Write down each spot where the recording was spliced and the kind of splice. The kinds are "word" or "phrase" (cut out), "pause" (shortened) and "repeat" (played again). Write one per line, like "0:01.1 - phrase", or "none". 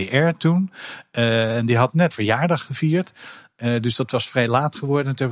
0:02.1 - word